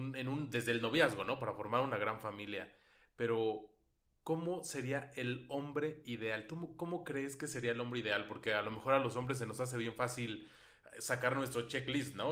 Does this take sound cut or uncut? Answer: uncut